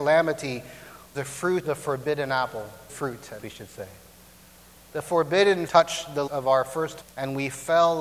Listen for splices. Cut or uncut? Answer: cut